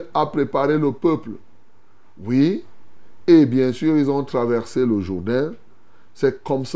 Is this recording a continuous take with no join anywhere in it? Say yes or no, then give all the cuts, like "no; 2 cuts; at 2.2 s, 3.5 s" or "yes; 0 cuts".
yes; 0 cuts